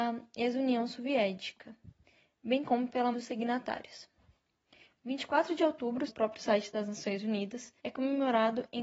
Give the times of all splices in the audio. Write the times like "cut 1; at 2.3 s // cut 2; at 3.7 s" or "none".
cut 1; at 3.1 s // cut 2; at 6.1 s // cut 3; at 7.8 s